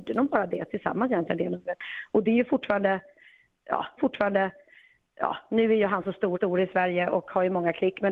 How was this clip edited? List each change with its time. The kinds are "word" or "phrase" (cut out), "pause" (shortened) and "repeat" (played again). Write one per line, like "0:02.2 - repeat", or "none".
0:04.0 - repeat
0:06.3 - repeat